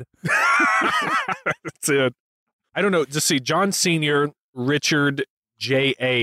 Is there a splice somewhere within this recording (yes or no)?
no